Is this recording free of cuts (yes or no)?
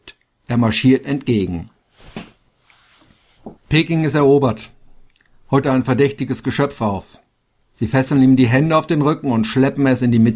no